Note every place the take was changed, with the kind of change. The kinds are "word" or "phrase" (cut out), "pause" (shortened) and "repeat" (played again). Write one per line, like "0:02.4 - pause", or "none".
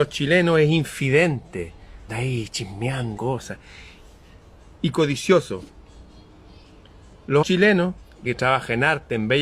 0:02.1 - word
0:03.2 - word
0:07.4 - word
0:08.3 - word